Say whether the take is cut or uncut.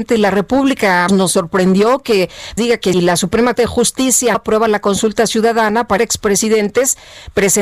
cut